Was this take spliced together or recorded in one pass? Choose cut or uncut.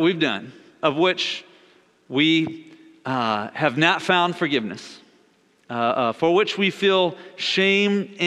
uncut